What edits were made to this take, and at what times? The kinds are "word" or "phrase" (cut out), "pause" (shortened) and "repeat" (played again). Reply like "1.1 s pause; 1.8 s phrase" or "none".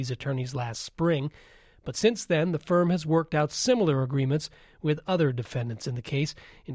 none